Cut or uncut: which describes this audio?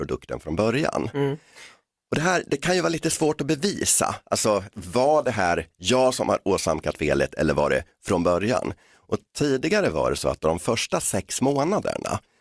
uncut